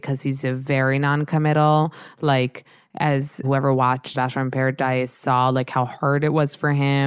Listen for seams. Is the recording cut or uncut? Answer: cut